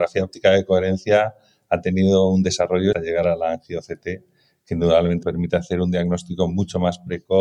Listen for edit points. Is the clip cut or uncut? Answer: cut